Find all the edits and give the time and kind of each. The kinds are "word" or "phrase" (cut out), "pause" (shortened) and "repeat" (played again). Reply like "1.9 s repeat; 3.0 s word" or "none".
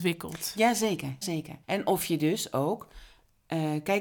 1.2 s word; 1.6 s pause